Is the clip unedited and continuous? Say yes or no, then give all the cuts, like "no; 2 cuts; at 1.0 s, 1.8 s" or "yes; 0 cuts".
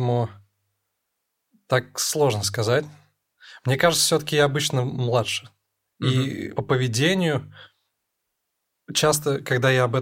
no; 1 cut; at 6.6 s